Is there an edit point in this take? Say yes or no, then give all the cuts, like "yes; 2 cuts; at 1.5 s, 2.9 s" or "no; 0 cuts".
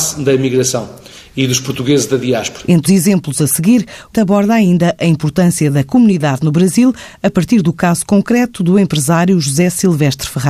yes; 2 cuts; at 2.9 s, 4.1 s